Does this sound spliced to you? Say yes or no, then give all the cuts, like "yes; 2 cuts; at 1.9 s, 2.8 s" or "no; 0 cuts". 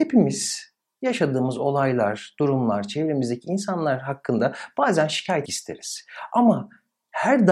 yes; 1 cut; at 5.5 s